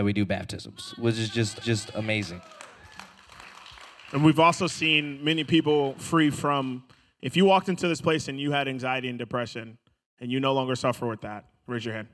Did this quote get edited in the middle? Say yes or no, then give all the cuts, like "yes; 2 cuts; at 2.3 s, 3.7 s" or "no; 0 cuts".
yes; 1 cut; at 1.6 s